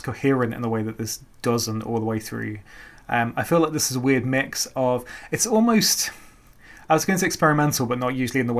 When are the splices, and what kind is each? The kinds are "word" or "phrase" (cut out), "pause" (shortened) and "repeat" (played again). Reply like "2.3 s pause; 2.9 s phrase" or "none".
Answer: none